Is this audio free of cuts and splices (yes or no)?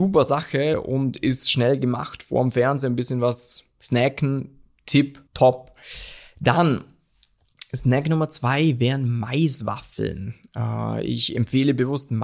no